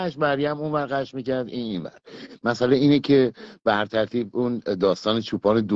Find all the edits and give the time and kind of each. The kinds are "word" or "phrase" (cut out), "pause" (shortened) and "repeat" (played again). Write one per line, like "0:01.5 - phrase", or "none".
none